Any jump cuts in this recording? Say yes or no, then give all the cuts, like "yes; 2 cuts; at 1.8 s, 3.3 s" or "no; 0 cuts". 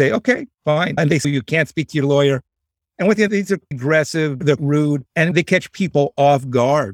yes; 4 cuts; at 1.2 s, 3.3 s, 3.7 s, 4.6 s